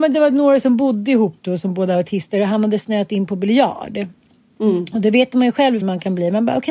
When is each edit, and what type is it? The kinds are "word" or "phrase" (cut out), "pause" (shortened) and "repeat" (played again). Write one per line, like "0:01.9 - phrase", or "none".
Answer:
0:05.8 - word